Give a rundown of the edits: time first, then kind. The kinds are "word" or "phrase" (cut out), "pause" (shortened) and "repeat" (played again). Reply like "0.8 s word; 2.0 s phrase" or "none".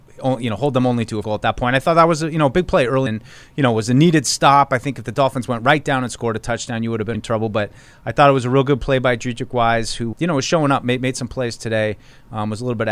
1.2 s word; 3.1 s word; 7.1 s word; 10.1 s word